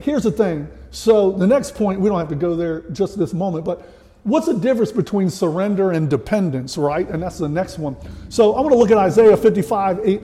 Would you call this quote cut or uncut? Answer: uncut